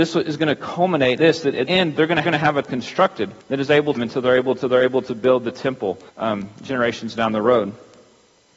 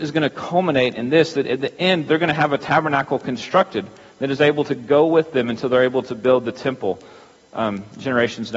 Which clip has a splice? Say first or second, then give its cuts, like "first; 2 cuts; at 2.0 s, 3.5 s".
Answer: first; 8 cuts; at 1.2 s, 1.7 s, 2.2 s, 2.6 s, 3.4 s, 4.0 s, 4.6 s, 6.1 s